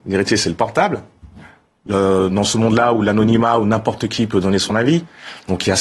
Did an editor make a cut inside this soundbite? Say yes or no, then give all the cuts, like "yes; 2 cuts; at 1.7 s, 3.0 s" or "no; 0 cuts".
no; 0 cuts